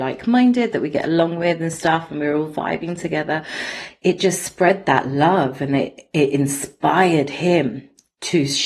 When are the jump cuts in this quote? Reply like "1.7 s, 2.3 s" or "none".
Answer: none